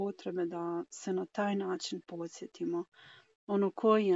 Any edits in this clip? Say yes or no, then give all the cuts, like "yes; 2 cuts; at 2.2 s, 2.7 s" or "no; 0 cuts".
no; 0 cuts